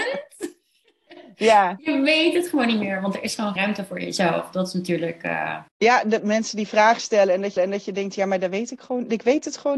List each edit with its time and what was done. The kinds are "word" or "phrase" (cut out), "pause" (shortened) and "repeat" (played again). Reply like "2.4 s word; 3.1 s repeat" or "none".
3.6 s word; 5.7 s pause; 7.6 s repeat